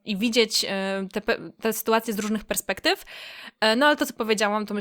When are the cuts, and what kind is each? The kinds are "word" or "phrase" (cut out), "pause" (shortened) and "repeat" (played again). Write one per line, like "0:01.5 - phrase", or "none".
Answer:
none